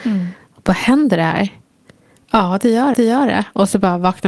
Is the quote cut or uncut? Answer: cut